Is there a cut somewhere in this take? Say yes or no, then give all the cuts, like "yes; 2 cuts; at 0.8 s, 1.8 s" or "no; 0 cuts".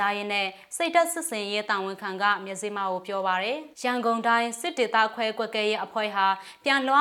yes; 1 cut; at 3.7 s